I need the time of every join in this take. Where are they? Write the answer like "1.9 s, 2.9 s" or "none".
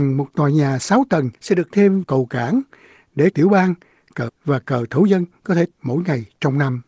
1.4 s, 1.7 s, 2.0 s, 3.3 s, 4.3 s, 5.7 s

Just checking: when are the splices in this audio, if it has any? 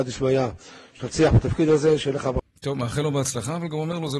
2.6 s

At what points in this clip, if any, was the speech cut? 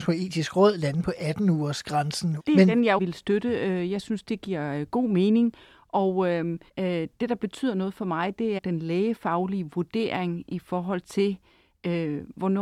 2.4 s, 3.0 s, 6.7 s, 8.6 s

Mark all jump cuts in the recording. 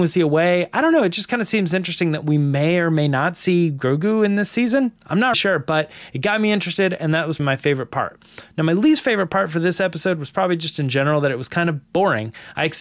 5.3 s, 7.4 s, 11.8 s

